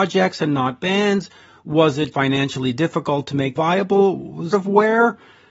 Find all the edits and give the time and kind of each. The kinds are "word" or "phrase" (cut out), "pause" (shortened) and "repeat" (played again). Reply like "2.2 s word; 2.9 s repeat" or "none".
2.1 s word; 3.5 s word; 4.5 s word